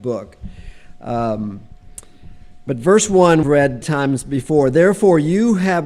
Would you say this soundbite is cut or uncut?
cut